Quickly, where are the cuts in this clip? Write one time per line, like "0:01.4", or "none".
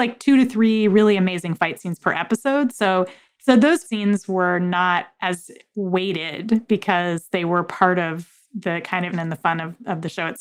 0:03.8
0:09.1